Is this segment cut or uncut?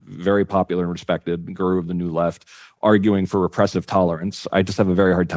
uncut